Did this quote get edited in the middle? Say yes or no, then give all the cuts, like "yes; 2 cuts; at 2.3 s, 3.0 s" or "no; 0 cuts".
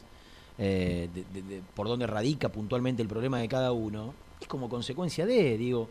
no; 0 cuts